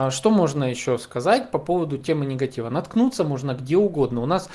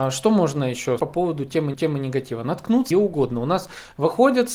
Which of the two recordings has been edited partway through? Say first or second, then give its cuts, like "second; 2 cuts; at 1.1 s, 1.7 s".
second; 3 cuts; at 1.0 s, 1.7 s, 2.9 s